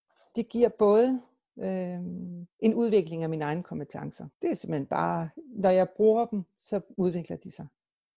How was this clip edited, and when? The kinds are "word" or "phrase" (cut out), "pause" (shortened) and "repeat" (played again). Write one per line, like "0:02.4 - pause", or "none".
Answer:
0:02.5 - pause
0:04.3 - pause